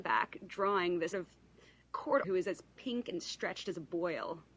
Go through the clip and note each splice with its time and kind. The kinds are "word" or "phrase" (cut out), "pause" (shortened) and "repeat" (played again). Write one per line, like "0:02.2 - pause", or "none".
0:01.1 - word
0:02.2 - word